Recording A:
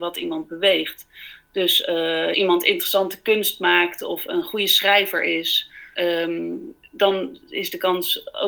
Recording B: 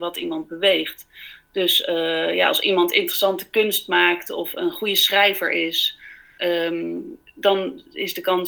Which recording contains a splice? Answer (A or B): A